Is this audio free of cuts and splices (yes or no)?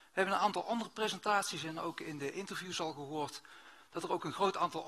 yes